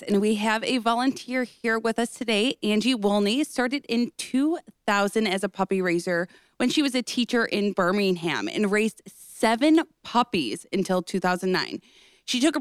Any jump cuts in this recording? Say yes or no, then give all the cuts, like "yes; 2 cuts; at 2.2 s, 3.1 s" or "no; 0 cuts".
no; 0 cuts